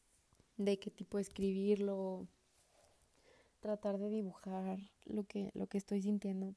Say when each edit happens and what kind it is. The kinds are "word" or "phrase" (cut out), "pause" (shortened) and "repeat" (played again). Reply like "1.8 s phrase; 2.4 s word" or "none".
none